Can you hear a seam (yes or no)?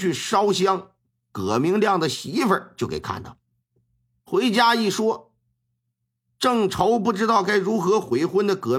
no